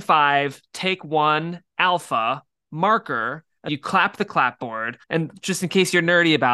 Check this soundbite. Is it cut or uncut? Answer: cut